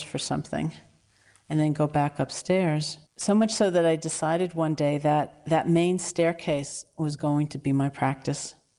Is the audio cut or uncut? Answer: cut